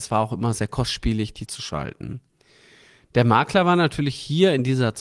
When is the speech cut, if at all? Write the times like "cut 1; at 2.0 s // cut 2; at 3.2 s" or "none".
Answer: cut 1; at 1.5 s